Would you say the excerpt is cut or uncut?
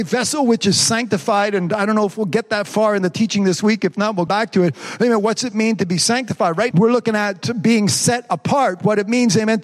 cut